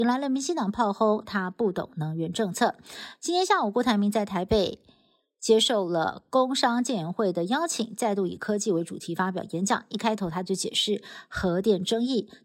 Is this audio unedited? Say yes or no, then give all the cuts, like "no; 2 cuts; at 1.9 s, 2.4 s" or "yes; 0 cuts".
yes; 0 cuts